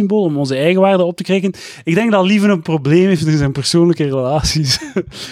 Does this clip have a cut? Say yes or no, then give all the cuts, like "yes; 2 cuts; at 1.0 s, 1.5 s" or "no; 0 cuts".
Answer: no; 0 cuts